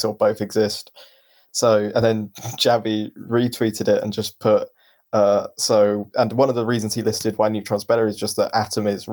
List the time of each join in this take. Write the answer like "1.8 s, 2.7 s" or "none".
none